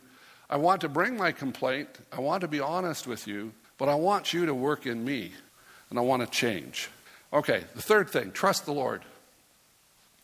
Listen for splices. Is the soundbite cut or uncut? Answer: cut